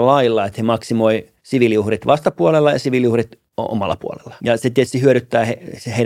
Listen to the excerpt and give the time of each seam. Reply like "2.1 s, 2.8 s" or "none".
1.4 s, 3.5 s, 4.4 s